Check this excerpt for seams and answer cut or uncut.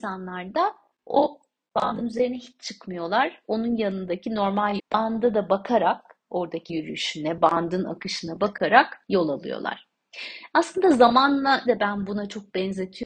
cut